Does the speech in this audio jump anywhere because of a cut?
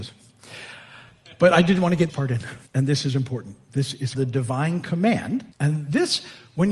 yes; 4 cuts; at 2.1 s, 2.7 s, 4.1 s, 5.5 s

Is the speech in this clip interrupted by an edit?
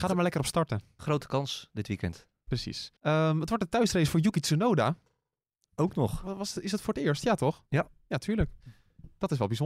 yes; 1 cut; at 3.0 s

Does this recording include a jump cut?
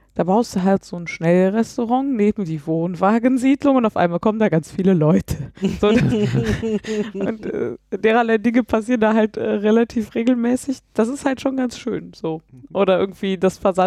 no; 0 cuts

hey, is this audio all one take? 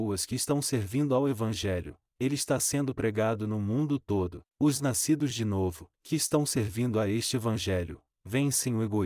no; 2 cuts; at 4.5 s, 5.9 s

